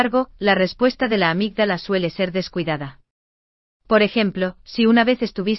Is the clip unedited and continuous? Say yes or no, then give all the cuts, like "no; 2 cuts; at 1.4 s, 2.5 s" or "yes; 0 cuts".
yes; 0 cuts